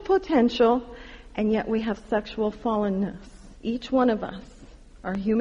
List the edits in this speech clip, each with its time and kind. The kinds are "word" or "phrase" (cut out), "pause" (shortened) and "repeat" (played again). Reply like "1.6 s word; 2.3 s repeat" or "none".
3.5 s pause

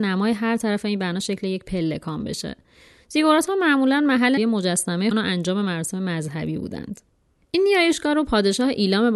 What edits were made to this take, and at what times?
4.4 s word; 5.1 s word

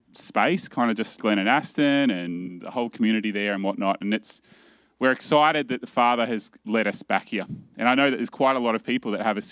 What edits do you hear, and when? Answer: 1.2 s word

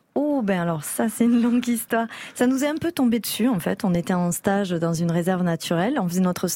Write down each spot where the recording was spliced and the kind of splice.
none

